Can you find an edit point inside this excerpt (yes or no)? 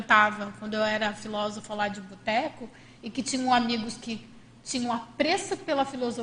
no